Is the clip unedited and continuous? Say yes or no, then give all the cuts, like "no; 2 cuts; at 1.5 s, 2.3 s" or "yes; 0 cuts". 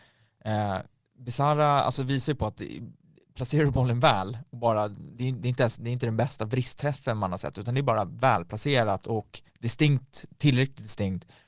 yes; 0 cuts